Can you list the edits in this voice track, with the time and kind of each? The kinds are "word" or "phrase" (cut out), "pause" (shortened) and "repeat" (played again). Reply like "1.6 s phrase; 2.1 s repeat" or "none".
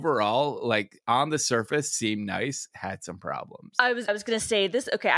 4.1 s word